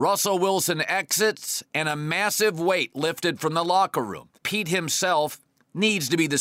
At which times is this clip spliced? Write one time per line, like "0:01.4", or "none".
0:04.4